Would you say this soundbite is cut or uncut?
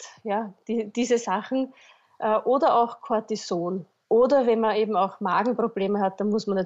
uncut